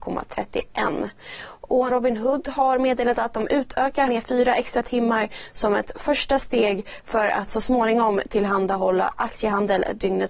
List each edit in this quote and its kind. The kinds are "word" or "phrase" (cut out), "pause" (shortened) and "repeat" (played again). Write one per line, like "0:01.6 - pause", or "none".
0:01.9 - word
0:04.1 - word